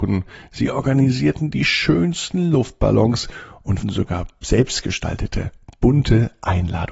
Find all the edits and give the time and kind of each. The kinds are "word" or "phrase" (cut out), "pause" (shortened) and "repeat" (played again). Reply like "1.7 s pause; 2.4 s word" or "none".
3.8 s word